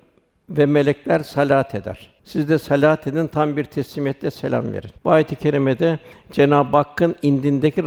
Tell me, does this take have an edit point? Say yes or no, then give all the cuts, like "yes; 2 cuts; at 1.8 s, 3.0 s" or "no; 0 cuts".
yes; 2 cuts; at 2.2 s, 5.0 s